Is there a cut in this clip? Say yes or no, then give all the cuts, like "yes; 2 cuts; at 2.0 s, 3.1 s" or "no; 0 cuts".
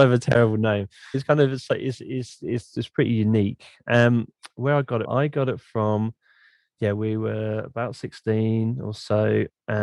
yes; 2 cuts; at 1.1 s, 5.0 s